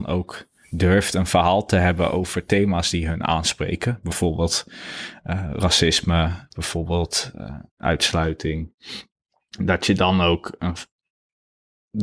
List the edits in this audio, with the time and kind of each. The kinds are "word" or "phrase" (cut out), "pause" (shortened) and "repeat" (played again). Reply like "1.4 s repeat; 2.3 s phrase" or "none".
6.5 s word; 7.7 s pause